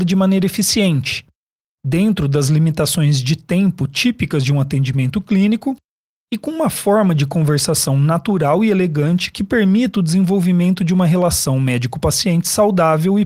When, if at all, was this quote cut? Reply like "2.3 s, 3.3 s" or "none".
none